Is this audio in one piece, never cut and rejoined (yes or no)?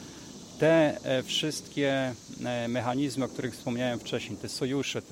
yes